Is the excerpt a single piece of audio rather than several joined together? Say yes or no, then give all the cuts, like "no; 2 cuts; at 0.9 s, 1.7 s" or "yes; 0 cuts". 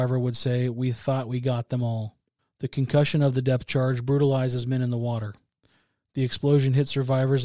no; 1 cut; at 2.4 s